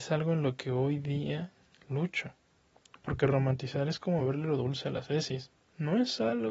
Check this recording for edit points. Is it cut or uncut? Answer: uncut